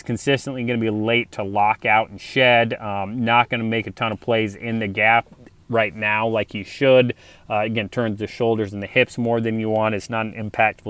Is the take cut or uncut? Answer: uncut